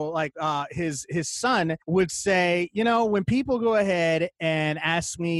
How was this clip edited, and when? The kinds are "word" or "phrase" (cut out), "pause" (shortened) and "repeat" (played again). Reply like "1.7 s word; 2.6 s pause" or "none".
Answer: 1.8 s pause